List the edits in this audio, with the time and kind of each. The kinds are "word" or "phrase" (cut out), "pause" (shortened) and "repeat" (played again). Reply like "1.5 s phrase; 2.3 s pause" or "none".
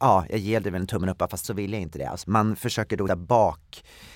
1.4 s word; 2.2 s word; 3.1 s word